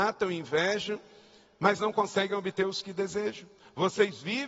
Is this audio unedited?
yes; 0 cuts

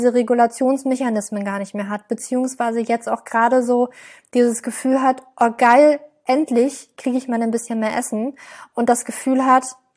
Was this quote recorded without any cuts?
yes; 0 cuts

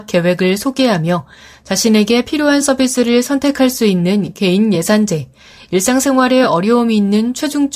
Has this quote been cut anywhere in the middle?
no; 0 cuts

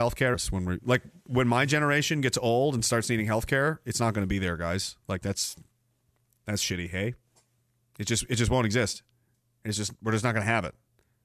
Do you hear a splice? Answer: no; 0 cuts

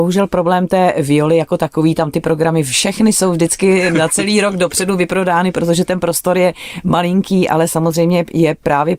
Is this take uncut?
yes; 0 cuts

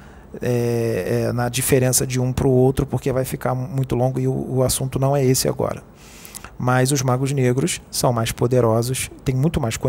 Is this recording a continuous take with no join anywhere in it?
yes; 0 cuts

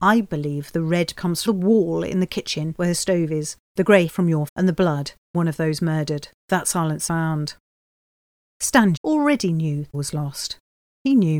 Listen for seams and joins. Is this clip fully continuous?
no; 8 cuts; at 1.1 s, 1.5 s, 4.1 s, 4.5 s, 5.3 s, 7.1 s, 9.0 s, 9.9 s

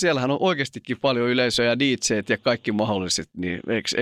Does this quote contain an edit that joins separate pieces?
no; 0 cuts

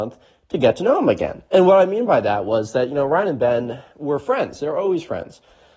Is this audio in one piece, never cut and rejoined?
no; 1 cut; at 1.5 s

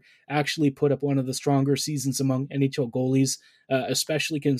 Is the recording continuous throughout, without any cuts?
yes; 0 cuts

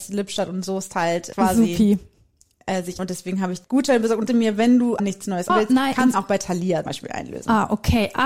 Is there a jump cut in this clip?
yes; 8 cuts; at 1.3 s, 3.0 s, 3.6 s, 4.3 s, 5.0 s, 5.5 s, 6.1 s, 6.9 s

